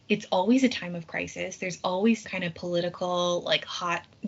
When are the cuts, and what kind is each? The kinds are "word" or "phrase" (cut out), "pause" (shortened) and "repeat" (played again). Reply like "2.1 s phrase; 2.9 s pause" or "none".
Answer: 2.2 s word